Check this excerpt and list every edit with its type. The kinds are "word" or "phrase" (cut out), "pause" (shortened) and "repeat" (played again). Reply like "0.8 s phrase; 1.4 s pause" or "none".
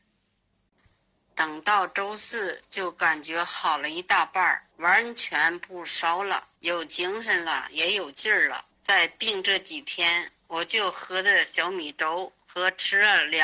4.7 s pause; 6.6 s pause; 8.7 s pause; 10.4 s pause